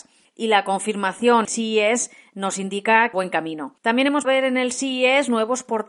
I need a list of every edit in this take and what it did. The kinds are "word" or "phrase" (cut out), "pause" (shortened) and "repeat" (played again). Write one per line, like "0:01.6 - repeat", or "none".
0:01.4 - phrase
0:03.1 - phrase
0:03.8 - pause
0:04.2 - word